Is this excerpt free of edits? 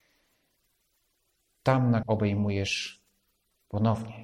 no; 1 cut; at 2.0 s

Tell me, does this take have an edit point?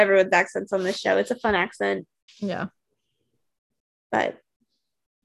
yes; 1 cut; at 2.3 s

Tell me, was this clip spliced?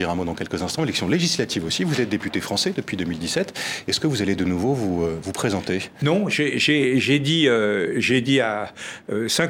no; 0 cuts

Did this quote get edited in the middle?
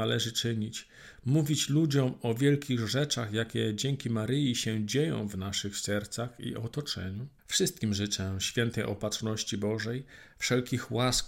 yes; 1 cut; at 7.4 s

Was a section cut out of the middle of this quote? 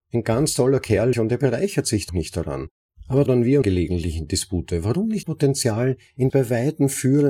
yes; 6 cuts; at 1.1 s, 2.1 s, 3.3 s, 3.6 s, 5.2 s, 6.3 s

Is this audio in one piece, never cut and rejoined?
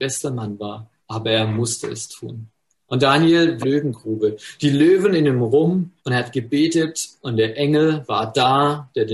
no; 4 cuts; at 1.0 s, 2.7 s, 3.6 s, 6.0 s

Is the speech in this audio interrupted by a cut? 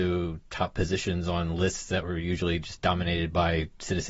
no; 0 cuts

